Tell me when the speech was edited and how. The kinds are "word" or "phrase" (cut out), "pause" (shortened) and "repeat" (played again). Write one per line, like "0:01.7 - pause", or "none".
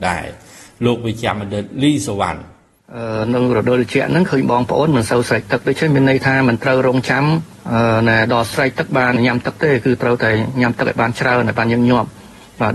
none